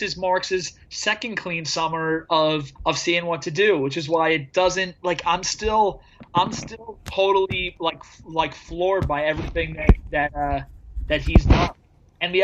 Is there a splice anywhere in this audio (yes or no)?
yes